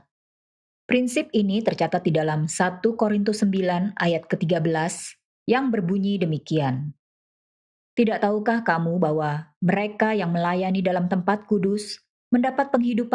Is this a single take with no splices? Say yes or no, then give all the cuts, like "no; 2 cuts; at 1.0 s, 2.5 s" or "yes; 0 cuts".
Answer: yes; 0 cuts